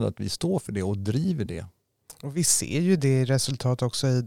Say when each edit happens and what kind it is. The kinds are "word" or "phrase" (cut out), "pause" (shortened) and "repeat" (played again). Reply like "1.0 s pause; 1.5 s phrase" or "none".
none